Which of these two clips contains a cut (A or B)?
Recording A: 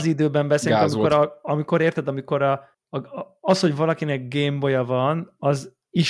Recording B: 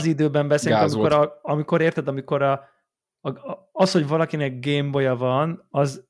A